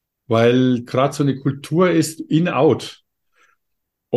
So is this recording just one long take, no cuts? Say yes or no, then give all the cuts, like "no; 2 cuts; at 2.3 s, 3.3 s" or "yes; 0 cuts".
yes; 0 cuts